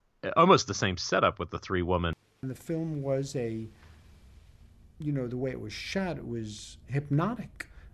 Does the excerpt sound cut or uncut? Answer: uncut